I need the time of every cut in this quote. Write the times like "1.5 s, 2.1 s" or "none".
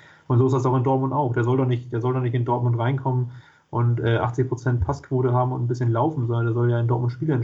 none